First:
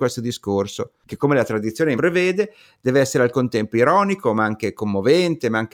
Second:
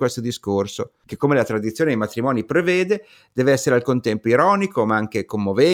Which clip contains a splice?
first; 1 cut; at 2.0 s

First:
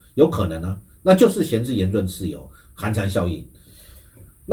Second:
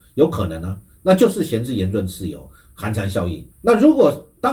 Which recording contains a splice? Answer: second; 1 cut; at 3.5 s

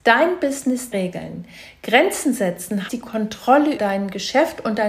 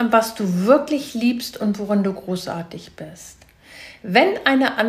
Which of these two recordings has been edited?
first; 3 cuts; at 0.9 s, 2.9 s, 3.8 s

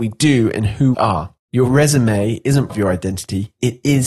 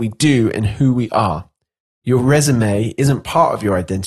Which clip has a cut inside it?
first; 3 cuts; at 0.9 s, 1.4 s, 2.7 s

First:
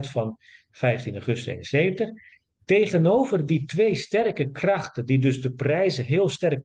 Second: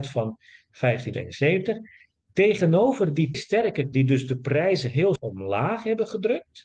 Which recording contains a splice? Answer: second; 4 cuts; at 1.1 s, 3.3 s, 3.9 s, 5.2 s

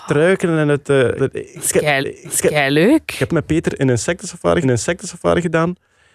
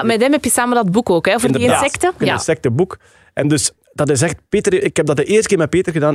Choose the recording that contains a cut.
first; 4 cuts; at 1.2 s, 2.0 s, 3.3 s, 4.6 s

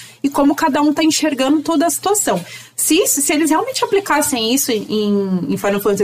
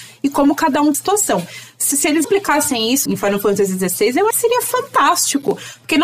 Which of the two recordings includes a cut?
second; 5 cuts; at 0.9 s, 1.9 s, 2.2 s, 3.1 s, 4.3 s

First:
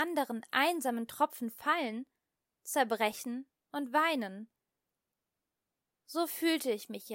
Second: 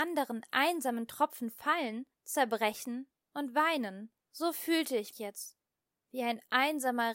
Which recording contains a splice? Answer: second; 3 cuts; at 2.1 s, 4.2 s, 5.1 s

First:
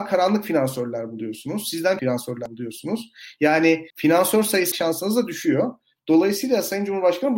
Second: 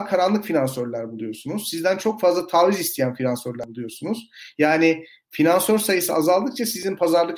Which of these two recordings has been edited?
first; 3 cuts; at 2.0 s, 3.9 s, 4.7 s

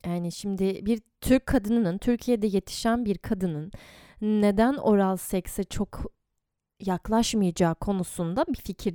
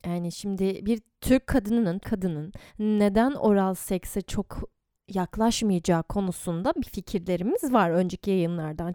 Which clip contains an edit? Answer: second; 3 cuts; at 2.0 s, 2.7 s, 5.0 s

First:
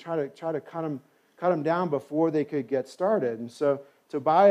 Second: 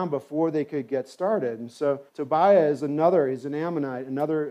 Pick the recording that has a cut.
second; 1 cut; at 2.1 s

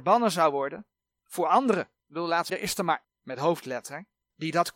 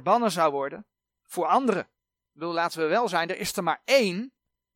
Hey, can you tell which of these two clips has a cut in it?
first; 3 cuts; at 2.0 s, 2.5 s, 3.0 s

